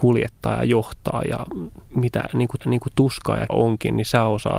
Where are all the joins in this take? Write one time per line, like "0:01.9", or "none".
0:01.9
0:02.6
0:03.5